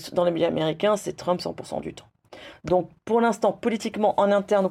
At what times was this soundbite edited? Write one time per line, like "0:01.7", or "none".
none